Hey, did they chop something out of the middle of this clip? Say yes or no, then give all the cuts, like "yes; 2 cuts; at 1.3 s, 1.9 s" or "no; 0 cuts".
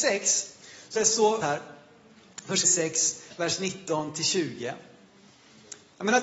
yes; 3 cuts; at 1.0 s, 1.4 s, 2.6 s